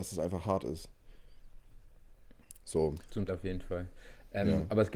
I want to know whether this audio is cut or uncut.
cut